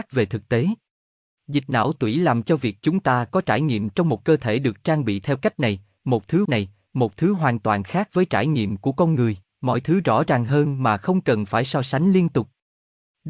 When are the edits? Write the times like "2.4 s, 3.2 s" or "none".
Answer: 6.4 s, 9.5 s